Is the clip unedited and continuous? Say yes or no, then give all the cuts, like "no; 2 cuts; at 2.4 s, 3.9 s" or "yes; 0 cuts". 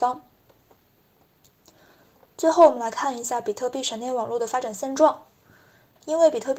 yes; 0 cuts